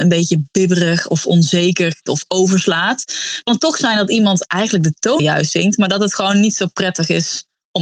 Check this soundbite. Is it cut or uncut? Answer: cut